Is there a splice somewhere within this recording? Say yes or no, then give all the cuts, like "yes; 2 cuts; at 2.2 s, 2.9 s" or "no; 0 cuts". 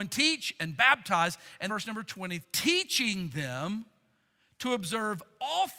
yes; 2 cuts; at 1.7 s, 2.4 s